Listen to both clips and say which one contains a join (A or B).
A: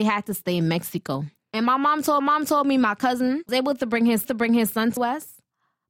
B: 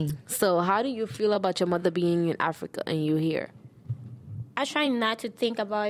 A